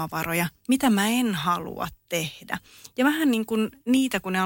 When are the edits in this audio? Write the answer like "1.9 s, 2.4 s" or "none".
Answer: none